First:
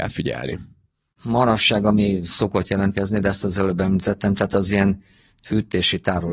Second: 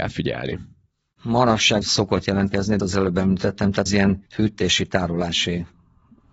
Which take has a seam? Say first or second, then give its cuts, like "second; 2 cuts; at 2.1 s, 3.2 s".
second; 4 cuts; at 1.8 s, 2.8 s, 3.9 s, 4.3 s